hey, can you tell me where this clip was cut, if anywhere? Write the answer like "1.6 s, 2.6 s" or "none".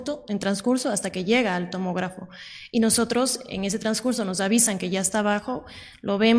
none